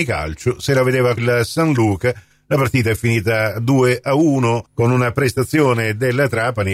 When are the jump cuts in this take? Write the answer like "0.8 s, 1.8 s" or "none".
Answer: 1.2 s